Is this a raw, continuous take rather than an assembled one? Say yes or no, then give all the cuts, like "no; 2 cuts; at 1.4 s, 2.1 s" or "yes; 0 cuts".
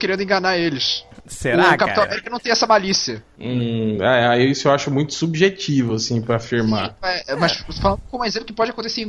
yes; 0 cuts